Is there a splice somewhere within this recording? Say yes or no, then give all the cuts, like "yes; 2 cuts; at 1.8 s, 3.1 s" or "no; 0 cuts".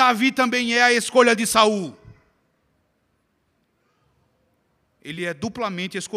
no; 0 cuts